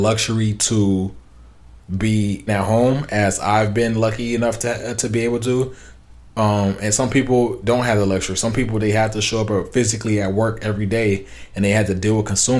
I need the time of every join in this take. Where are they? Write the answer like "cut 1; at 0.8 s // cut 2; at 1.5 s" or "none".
cut 1; at 2.5 s